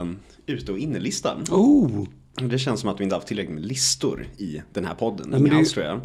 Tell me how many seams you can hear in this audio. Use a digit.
0